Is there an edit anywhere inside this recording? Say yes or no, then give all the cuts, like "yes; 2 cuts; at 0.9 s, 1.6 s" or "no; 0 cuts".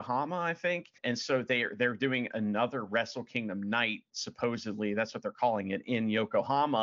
yes; 1 cut; at 1.0 s